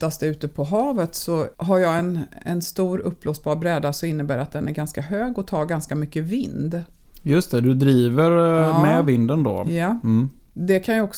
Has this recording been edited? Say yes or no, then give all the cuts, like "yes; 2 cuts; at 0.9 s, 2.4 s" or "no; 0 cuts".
no; 0 cuts